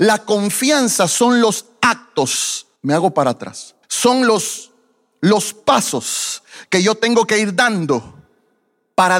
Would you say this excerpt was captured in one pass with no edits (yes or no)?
no